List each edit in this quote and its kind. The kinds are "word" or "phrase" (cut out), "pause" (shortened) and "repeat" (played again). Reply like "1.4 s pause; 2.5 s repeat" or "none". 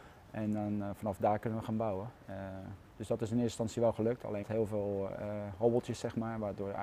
4.4 s word